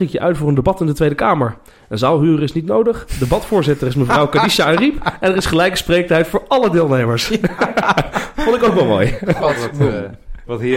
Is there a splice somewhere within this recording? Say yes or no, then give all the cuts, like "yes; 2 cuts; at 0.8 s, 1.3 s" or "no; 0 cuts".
no; 0 cuts